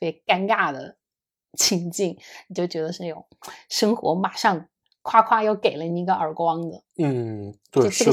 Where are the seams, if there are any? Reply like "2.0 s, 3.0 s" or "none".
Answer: none